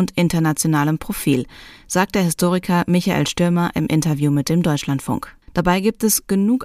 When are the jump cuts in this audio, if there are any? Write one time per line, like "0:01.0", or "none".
0:05.4